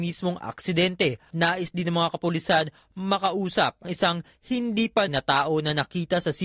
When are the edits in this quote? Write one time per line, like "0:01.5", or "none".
0:01.3
0:03.8
0:05.1